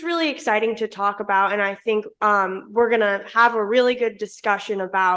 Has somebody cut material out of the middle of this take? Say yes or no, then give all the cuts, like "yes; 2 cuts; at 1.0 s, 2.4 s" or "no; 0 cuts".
no; 0 cuts